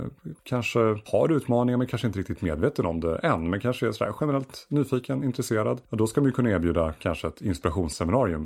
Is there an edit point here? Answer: no; 0 cuts

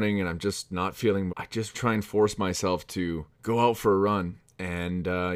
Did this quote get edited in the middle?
yes; 3 cuts; at 1.3 s, 1.7 s, 3.3 s

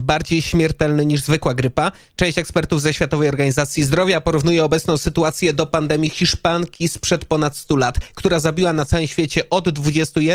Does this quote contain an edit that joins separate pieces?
no; 0 cuts

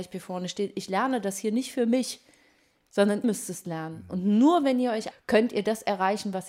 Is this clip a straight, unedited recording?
no; 2 cuts; at 3.2 s, 5.1 s

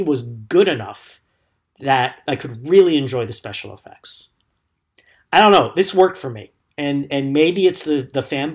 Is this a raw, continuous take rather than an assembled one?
no; 1 cut; at 2.3 s

